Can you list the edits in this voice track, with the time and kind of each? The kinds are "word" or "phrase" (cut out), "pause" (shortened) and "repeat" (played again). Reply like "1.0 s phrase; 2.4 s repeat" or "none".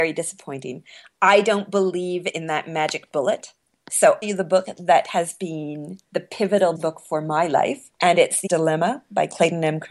4.2 s phrase; 6.0 s pause; 6.8 s word; 7.9 s pause; 8.5 s word